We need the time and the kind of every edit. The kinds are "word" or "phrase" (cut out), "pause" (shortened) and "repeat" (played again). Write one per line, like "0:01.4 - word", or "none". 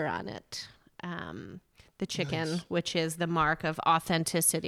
none